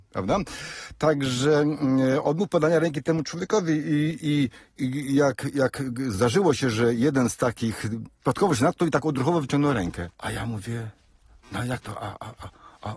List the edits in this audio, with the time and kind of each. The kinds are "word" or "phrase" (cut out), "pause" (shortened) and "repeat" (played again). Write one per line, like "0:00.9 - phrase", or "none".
0:10.1 - pause